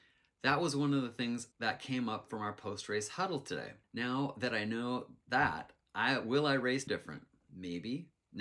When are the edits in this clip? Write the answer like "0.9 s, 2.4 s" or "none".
1.5 s, 3.8 s, 6.9 s